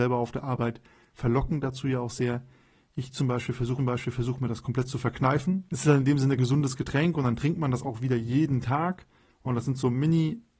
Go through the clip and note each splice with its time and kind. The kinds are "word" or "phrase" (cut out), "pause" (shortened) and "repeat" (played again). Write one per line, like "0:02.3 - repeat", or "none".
0:03.8 - repeat
0:06.4 - word

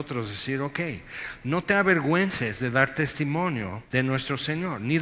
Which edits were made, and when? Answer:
0:03.8 - pause

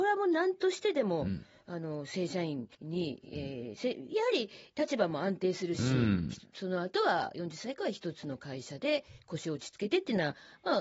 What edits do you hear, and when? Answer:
0:02.7 - pause

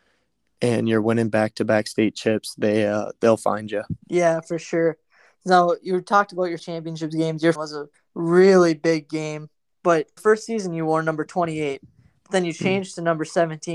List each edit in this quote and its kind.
0:04.0 - pause
0:06.6 - word
0:07.5 - phrase
0:07.9 - pause
0:09.7 - word
0:10.2 - word

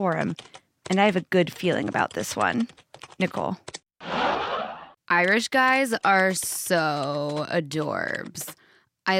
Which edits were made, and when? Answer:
none

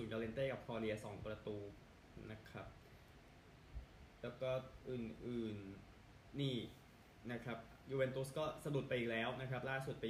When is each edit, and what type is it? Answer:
0:06.3 - word

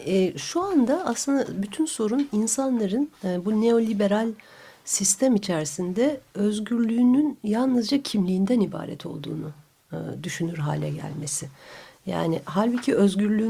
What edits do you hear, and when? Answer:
none

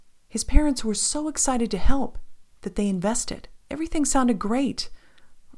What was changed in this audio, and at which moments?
0:03.6 - pause

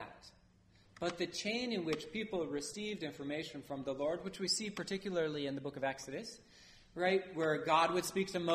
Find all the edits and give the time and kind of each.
none

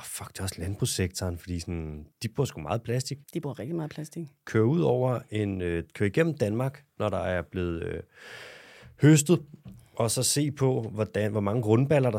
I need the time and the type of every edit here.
0:02.1 - pause
0:03.2 - pause

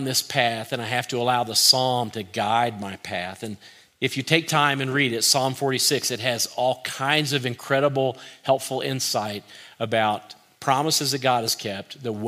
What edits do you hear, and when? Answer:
none

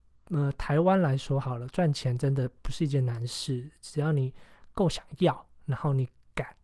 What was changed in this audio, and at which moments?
none

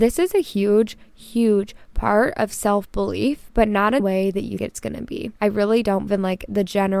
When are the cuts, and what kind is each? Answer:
0:04.0 - word
0:04.6 - word
0:05.4 - pause
0:06.1 - word

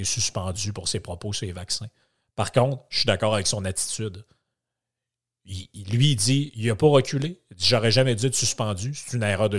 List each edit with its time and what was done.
none

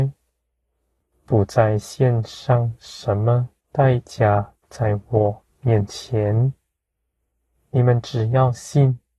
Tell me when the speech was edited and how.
0:03.6 - pause

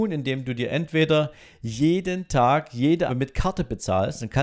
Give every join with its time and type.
0:03.1 - word

